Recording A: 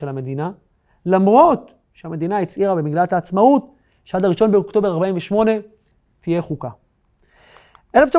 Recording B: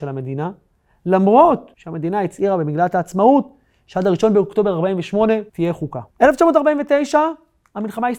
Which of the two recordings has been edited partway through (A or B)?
B